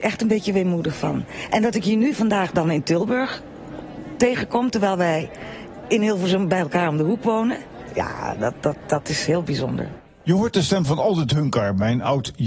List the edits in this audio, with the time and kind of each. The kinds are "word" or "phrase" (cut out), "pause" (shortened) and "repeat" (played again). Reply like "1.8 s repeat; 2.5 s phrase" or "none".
none